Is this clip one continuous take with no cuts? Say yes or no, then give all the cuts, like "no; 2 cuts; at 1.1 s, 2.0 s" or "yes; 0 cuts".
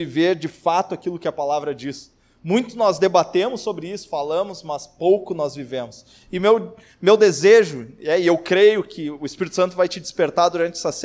yes; 0 cuts